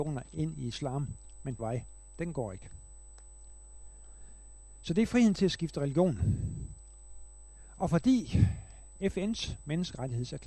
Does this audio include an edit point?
yes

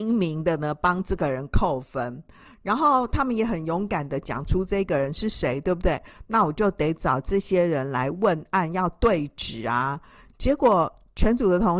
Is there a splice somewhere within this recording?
no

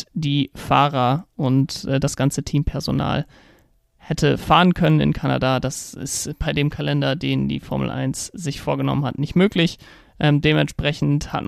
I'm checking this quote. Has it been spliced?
no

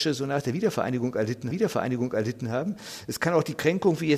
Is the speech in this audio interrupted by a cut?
yes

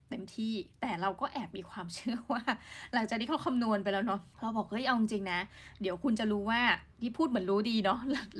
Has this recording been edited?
yes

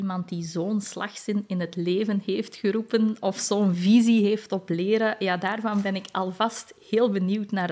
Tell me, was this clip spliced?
no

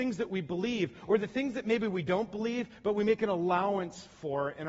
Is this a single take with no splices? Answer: yes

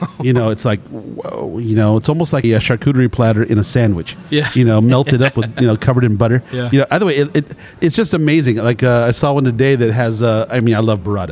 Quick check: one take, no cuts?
no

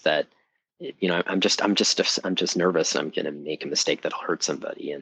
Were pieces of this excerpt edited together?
no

